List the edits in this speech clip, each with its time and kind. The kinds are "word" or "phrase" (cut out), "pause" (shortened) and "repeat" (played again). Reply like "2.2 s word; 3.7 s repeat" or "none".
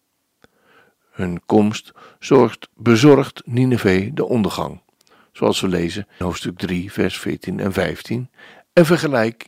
6.2 s word